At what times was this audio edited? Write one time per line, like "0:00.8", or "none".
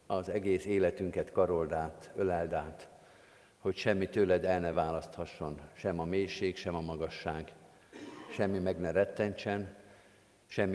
none